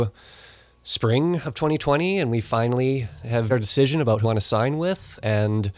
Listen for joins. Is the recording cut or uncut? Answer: cut